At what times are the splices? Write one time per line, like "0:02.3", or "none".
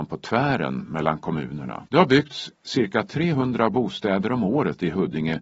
0:01.9